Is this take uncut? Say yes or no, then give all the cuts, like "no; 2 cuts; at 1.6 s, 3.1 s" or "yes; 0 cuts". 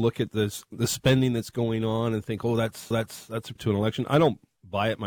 no; 2 cuts; at 2.9 s, 3.6 s